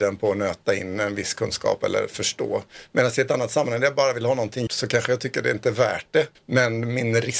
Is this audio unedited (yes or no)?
no